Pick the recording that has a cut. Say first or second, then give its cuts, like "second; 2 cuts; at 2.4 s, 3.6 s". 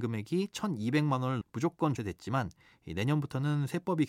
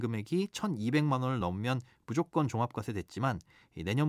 first; 2 cuts; at 1.4 s, 2.0 s